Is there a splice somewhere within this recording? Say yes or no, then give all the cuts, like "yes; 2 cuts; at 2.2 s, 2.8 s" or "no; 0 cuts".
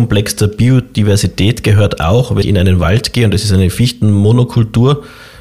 yes; 1 cut; at 2.4 s